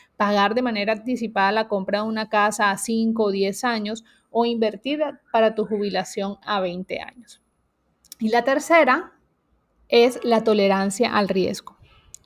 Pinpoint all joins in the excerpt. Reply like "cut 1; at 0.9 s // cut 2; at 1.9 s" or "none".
cut 1; at 9.4 s

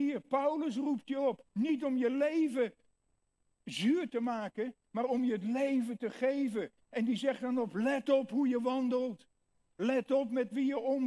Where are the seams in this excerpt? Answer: cut 1; at 1.5 s

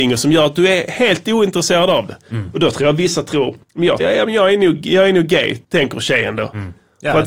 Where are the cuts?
cut 1; at 3.6 s // cut 2; at 4.0 s // cut 3; at 5.6 s

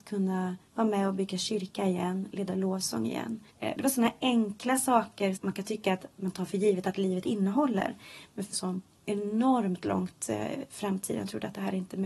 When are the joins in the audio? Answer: cut 1; at 3.5 s // cut 2; at 5.4 s // cut 3; at 8.5 s

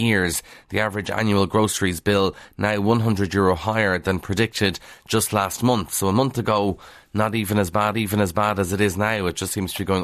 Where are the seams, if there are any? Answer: cut 1; at 7.9 s

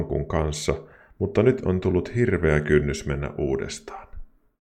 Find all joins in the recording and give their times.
none

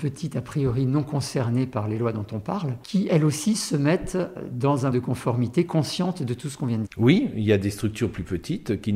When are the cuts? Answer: cut 1; at 4.9 s // cut 2; at 6.9 s

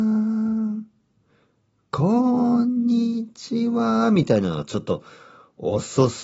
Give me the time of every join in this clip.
none

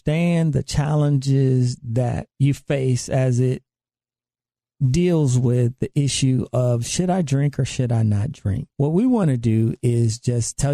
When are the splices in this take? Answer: cut 1; at 2.3 s // cut 2; at 8.7 s

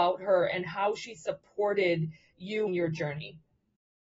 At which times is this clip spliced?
cut 1; at 2.7 s

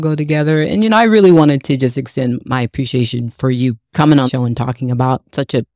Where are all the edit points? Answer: cut 1; at 4.3 s

